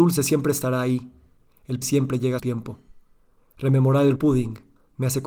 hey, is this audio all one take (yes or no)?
no